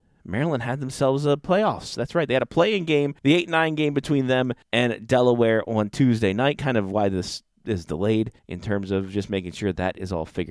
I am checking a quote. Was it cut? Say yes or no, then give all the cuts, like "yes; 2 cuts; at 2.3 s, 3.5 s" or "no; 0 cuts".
yes; 3 cuts; at 3.2 s, 4.6 s, 8.4 s